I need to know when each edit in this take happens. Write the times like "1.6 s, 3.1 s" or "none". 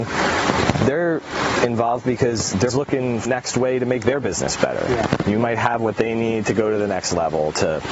2.7 s, 3.3 s